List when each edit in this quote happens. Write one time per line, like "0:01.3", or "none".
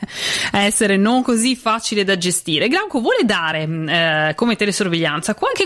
none